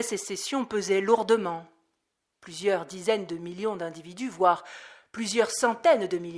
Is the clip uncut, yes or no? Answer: yes